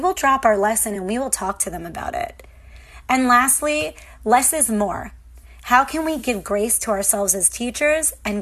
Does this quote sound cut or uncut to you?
uncut